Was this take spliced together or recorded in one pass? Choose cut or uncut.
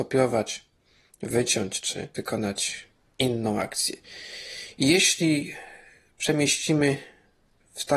uncut